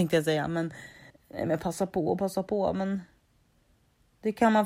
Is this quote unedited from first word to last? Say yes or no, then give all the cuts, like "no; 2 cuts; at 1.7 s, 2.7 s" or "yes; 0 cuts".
no; 1 cut; at 1.1 s